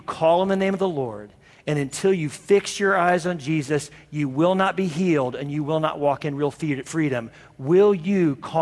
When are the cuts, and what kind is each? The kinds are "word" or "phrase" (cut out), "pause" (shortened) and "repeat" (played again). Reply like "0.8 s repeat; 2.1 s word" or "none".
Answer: none